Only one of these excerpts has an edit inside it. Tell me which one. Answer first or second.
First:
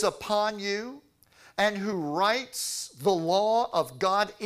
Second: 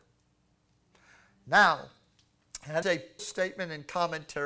second